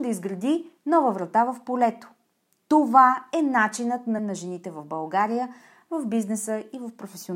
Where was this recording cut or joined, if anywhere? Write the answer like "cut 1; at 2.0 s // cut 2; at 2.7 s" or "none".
cut 1; at 4.2 s

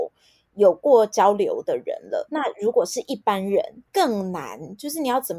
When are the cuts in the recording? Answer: cut 1; at 2.3 s

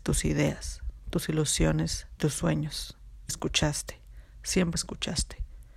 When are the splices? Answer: cut 1; at 2.2 s // cut 2; at 3.3 s // cut 3; at 4.8 s

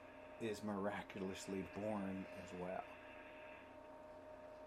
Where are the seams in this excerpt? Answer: none

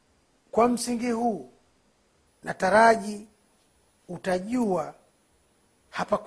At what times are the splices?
none

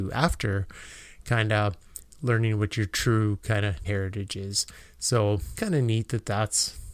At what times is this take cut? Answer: cut 1; at 3.8 s // cut 2; at 5.5 s

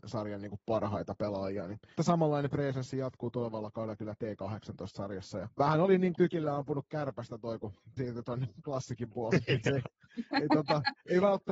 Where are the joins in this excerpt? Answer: cut 1; at 2.0 s // cut 2; at 5.5 s // cut 3; at 6.1 s // cut 4; at 8.0 s

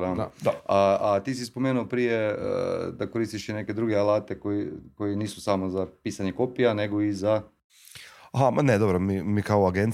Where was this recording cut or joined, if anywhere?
none

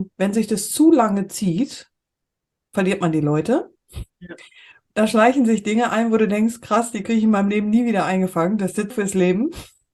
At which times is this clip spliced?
cut 1; at 8.9 s

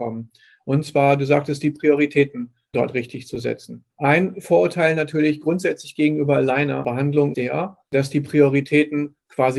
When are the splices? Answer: cut 1; at 3.9 s // cut 2; at 7.3 s // cut 3; at 7.9 s

